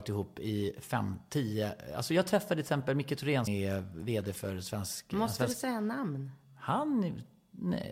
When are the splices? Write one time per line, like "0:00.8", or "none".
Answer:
0:03.5